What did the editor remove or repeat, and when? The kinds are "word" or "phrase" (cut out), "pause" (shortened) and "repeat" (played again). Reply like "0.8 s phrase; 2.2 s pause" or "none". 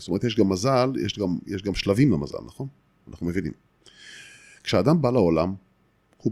none